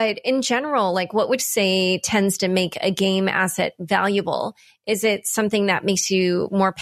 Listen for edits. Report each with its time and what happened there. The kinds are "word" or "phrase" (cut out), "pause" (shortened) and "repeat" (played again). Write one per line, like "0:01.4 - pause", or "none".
0:01.4 - word